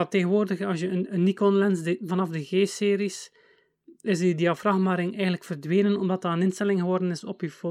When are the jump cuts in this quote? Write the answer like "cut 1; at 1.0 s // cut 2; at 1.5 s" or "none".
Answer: none